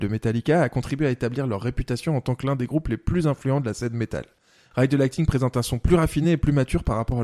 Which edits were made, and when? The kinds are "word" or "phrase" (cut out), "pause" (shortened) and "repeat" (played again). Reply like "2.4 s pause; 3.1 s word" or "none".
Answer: none